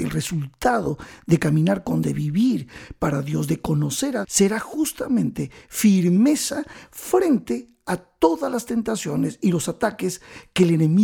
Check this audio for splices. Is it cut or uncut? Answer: cut